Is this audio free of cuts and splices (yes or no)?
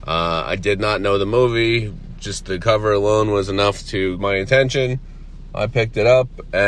no